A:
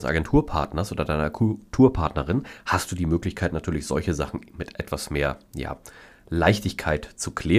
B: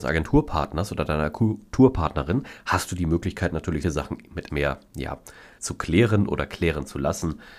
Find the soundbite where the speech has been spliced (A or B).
B